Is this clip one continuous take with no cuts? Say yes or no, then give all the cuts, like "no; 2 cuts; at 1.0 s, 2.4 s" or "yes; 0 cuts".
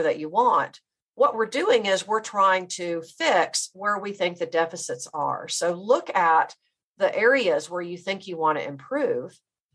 yes; 0 cuts